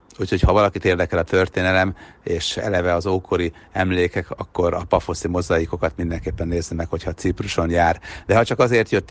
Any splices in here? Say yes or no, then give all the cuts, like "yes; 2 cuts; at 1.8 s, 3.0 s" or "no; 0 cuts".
no; 0 cuts